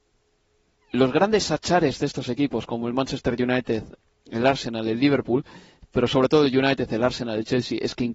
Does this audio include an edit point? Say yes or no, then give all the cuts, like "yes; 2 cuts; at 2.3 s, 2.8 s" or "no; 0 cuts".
no; 0 cuts